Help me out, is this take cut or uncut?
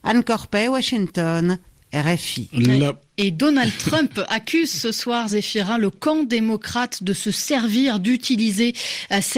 uncut